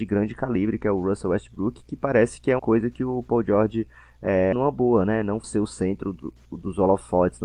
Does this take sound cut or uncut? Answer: cut